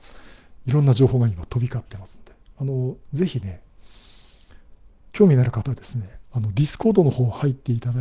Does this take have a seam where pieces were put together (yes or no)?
no